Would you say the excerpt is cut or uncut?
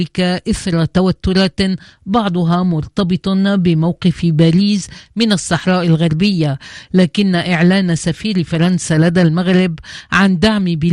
uncut